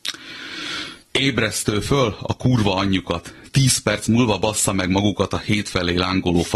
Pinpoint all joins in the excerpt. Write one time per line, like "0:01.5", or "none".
0:01.0